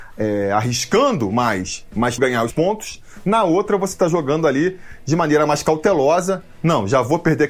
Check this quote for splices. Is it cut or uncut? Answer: cut